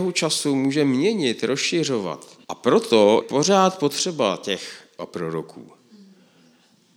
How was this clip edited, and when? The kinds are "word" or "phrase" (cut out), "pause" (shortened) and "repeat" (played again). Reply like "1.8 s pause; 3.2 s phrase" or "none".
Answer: 2.4 s pause; 3.2 s word; 5.0 s word